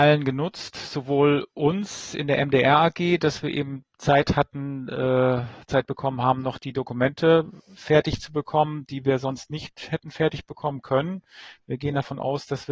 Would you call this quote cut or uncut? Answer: uncut